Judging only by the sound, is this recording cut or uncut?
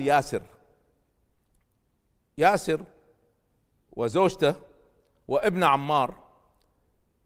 uncut